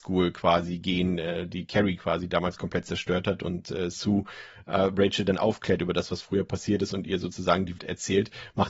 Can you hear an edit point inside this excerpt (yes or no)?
yes